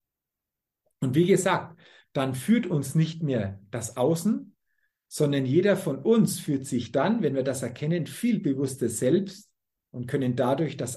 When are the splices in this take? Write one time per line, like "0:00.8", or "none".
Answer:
none

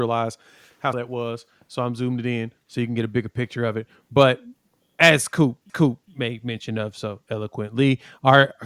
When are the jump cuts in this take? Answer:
0:00.9
0:05.7

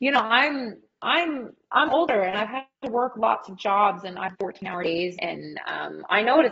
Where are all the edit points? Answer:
0:04.3
0:05.2

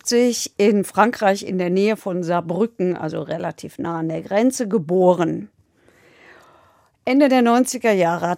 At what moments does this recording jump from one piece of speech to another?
none

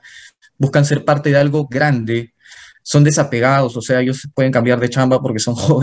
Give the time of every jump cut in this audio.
none

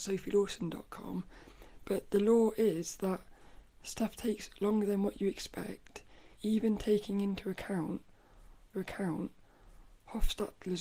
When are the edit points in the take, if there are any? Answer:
0:06.3
0:08.7

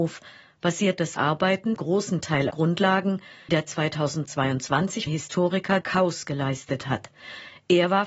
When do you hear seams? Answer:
0:01.2
0:01.8
0:02.5
0:03.5
0:05.1
0:05.8

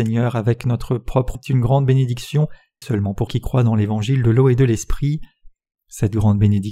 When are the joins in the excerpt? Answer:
0:01.3
0:02.8
0:03.3

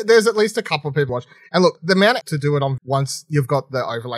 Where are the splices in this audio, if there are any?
0:01.1
0:01.8
0:02.2
0:02.8

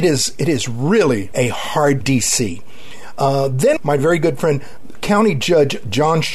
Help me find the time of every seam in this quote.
0:01.3
0:02.0
0:03.8
0:04.9

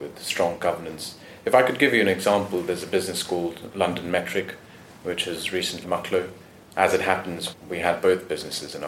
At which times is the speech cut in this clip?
0:05.8
0:07.5

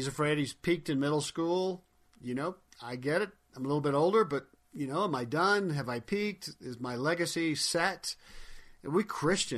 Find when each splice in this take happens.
0:02.1
0:02.7

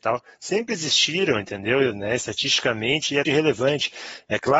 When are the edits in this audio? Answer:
0:03.2

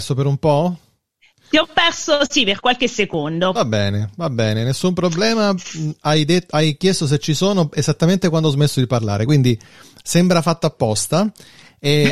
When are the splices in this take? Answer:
none

